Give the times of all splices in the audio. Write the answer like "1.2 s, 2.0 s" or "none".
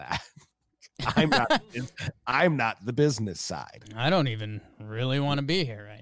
none

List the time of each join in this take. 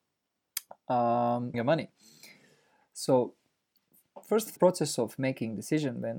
1.5 s, 4.6 s

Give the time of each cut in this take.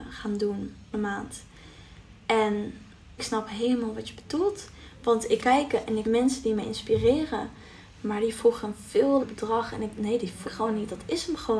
0.9 s, 3.2 s, 5.4 s, 6.0 s, 9.2 s, 9.9 s, 10.5 s

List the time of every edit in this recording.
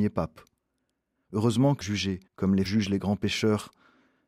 1.8 s, 2.3 s, 2.6 s

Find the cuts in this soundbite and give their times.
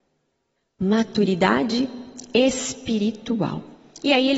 none

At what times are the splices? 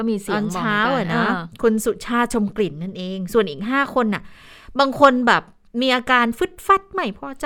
none

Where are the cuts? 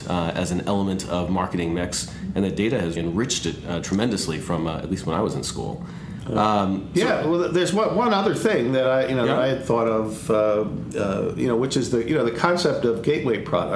3.0 s

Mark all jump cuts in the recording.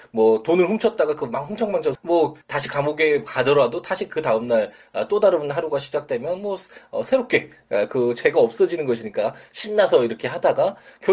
1.9 s, 2.4 s

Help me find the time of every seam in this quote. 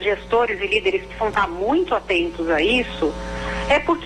none

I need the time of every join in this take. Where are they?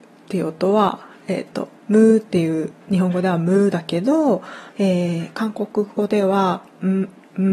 1.8 s, 2.8 s, 4.7 s

